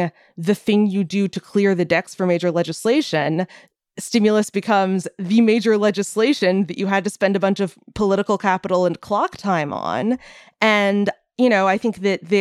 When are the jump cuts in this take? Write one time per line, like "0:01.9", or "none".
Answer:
none